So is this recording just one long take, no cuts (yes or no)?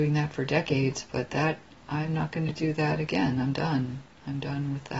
yes